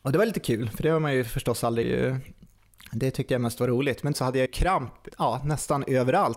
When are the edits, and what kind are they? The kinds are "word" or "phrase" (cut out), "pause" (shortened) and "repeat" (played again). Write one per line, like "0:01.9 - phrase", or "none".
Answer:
0:01.8 - phrase
0:04.1 - word
0:04.5 - word
0:05.1 - word